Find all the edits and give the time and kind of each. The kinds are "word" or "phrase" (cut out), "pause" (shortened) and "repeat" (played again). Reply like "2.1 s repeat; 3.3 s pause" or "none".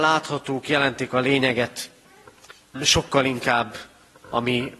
2.8 s word